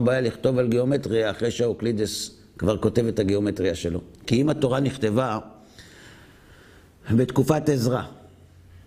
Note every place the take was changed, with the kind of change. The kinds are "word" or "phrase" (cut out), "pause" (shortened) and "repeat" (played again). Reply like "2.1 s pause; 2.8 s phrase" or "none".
4.1 s pause